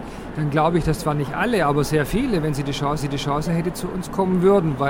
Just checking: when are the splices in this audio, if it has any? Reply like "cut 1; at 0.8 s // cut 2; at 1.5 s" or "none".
cut 1; at 3.0 s